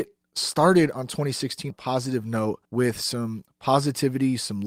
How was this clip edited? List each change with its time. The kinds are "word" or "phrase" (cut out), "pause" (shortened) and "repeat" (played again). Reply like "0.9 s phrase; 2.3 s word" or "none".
1.7 s word; 2.6 s pause